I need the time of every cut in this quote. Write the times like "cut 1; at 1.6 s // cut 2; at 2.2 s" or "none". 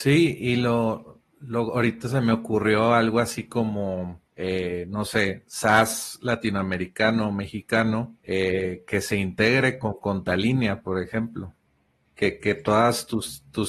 cut 1; at 4.3 s // cut 2; at 8.2 s // cut 3; at 11.6 s

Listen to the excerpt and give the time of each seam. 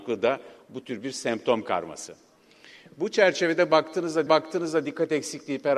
cut 1; at 4.3 s

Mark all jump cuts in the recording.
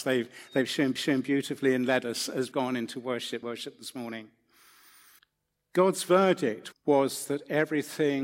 cut 1; at 1.0 s // cut 2; at 2.5 s // cut 3; at 3.4 s // cut 4; at 5.2 s // cut 5; at 6.7 s

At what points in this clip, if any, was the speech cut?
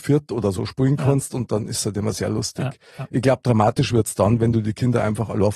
none

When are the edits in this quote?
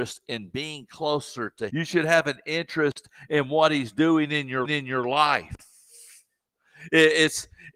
cut 1; at 1.7 s // cut 2; at 4.6 s

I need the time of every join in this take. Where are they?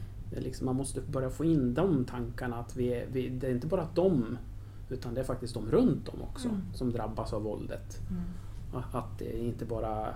none

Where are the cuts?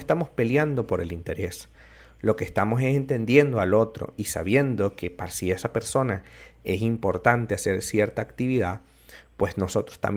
none

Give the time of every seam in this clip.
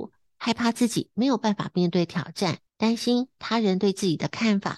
cut 1; at 2.7 s

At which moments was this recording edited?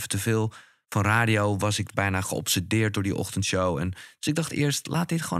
none

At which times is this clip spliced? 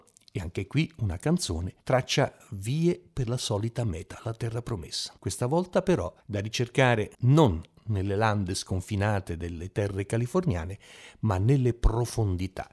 cut 1; at 1.8 s // cut 2; at 5.2 s // cut 3; at 6.2 s // cut 4; at 7.1 s

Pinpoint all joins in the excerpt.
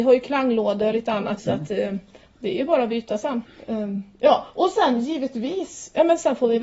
cut 1; at 0.9 s // cut 2; at 1.4 s

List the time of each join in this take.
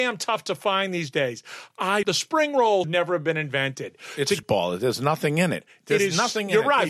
cut 1; at 2.0 s // cut 2; at 2.8 s // cut 3; at 4.4 s

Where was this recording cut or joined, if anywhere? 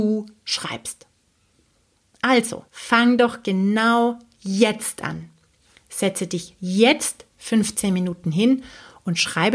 cut 1; at 2.7 s

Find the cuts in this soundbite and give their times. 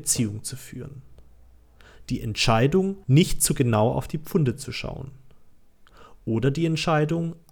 cut 1; at 3.0 s

